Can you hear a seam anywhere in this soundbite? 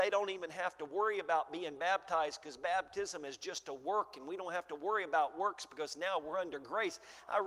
no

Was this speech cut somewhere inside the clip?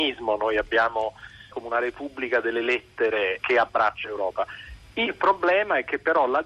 yes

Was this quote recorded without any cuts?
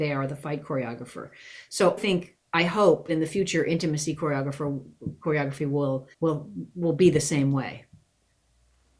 no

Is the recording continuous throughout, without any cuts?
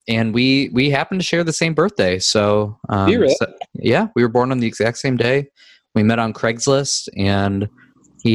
yes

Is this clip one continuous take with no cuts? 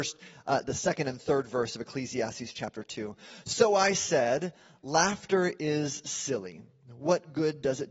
yes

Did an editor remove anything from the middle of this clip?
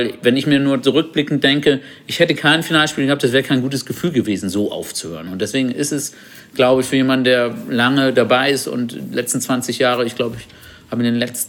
no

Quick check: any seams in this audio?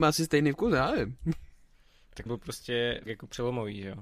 yes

